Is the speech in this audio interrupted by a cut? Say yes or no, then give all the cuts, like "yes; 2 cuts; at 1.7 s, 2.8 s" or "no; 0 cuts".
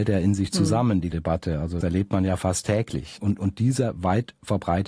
yes; 2 cuts; at 1.1 s, 1.8 s